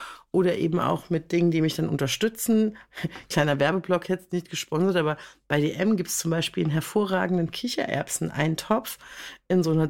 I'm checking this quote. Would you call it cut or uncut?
uncut